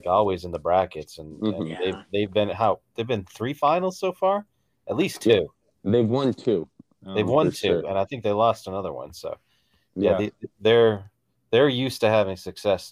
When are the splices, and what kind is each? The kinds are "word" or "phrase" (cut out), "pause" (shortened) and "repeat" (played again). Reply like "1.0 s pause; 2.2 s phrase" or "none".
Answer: none